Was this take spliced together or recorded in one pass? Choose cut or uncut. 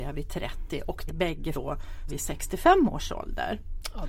cut